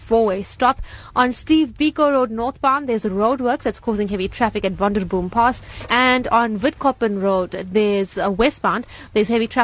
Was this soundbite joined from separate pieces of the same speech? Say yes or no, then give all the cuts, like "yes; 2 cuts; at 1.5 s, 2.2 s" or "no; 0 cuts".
no; 0 cuts